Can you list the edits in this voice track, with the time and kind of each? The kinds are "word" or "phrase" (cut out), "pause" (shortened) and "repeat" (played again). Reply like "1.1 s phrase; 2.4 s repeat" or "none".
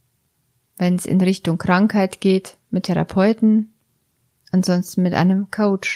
2.8 s word